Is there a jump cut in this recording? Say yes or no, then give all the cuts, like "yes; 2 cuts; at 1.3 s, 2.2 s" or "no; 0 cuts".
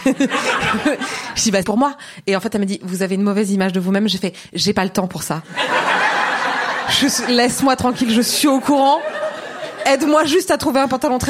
yes; 1 cut; at 1.6 s